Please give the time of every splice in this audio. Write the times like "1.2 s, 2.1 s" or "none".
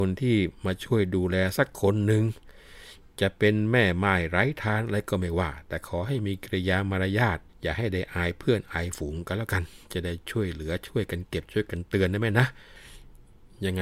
7.5 s